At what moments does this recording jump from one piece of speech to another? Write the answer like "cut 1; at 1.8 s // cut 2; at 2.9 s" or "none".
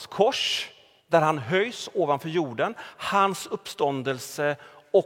cut 1; at 1.0 s